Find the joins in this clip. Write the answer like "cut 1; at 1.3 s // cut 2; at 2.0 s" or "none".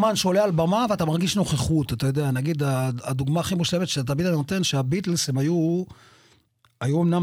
none